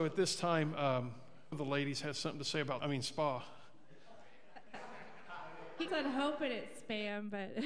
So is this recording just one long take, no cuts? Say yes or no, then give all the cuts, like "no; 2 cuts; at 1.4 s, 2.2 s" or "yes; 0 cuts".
no; 3 cuts; at 1.5 s, 2.8 s, 5.9 s